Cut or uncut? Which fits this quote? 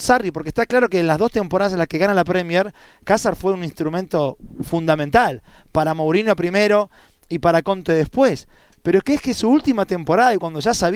uncut